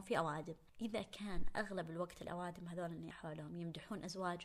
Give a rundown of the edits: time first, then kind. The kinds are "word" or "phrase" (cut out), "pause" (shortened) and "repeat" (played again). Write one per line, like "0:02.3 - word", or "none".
0:03.1 - word